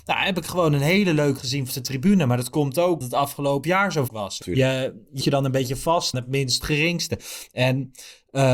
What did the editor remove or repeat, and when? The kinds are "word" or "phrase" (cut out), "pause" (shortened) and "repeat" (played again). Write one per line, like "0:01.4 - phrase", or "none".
0:01.4 - word
0:01.7 - word
0:03.0 - word
0:03.6 - word
0:04.1 - word
0:04.4 - word
0:05.2 - word
0:06.1 - word
0:06.6 - word